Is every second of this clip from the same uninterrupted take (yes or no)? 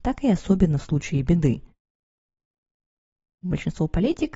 yes